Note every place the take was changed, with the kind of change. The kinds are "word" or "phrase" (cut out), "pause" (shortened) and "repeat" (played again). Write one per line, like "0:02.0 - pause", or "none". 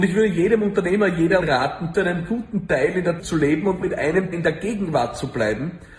0:01.4 - word
0:01.9 - word
0:03.2 - word
0:03.8 - word
0:04.3 - word